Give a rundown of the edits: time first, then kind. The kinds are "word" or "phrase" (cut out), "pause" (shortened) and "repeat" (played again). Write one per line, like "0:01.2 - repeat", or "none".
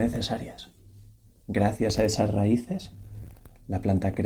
none